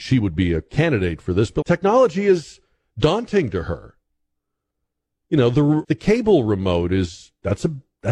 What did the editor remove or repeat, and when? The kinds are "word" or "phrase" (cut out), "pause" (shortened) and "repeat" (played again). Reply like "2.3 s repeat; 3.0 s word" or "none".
1.6 s word; 5.8 s word